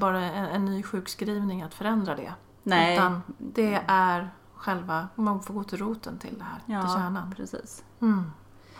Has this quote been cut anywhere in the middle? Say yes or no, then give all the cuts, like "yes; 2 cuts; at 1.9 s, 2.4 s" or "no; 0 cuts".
yes; 1 cut; at 2.5 s